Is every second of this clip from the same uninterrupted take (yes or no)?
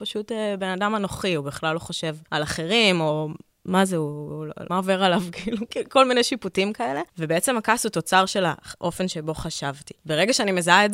no